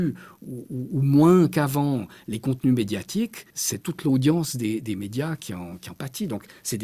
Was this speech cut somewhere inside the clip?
yes; 1 cut; at 3.5 s

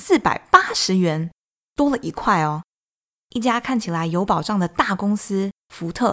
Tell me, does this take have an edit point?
no; 0 cuts

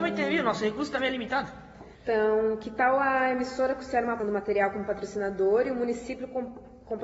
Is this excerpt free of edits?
no; 2 cuts; at 1.9 s, 4.2 s

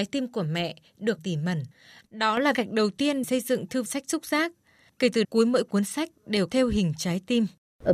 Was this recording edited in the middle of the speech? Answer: yes; 6 cuts; at 1.2 s, 2.5 s, 3.2 s, 3.9 s, 5.2 s, 6.5 s

